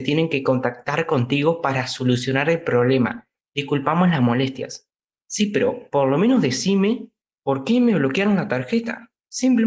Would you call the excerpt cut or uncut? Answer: uncut